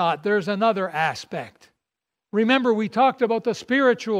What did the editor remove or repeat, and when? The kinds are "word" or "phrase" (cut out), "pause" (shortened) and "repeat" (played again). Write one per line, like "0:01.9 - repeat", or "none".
none